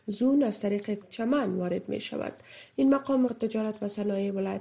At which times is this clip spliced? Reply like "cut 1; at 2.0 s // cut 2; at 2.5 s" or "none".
cut 1; at 1.0 s // cut 2; at 3.3 s

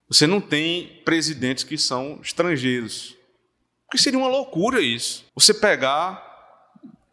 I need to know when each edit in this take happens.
cut 1; at 5.3 s

